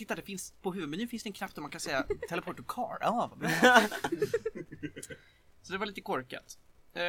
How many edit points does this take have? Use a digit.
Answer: 0